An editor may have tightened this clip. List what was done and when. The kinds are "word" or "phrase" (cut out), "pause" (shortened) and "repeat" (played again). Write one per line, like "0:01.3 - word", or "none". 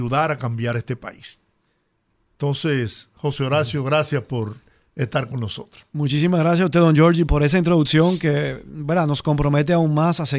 0:07.3 - word